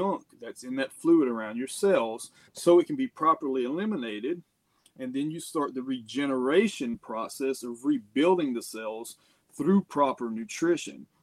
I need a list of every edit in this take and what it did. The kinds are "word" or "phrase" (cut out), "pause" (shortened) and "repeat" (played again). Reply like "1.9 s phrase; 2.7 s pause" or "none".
2.4 s pause